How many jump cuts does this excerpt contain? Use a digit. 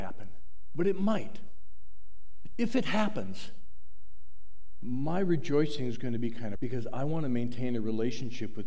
1